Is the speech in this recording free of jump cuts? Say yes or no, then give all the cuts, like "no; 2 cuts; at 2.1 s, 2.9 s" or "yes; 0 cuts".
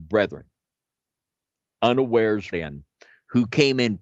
no; 1 cut; at 2.5 s